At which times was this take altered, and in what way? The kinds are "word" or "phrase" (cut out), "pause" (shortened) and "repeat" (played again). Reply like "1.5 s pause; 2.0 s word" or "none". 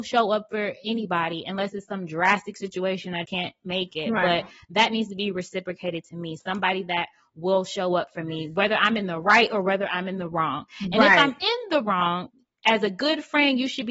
3.2 s word